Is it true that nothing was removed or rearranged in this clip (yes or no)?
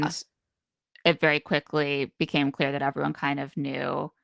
yes